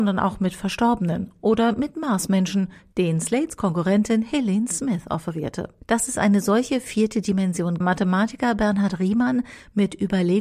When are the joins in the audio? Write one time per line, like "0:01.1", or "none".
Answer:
0:05.8
0:07.8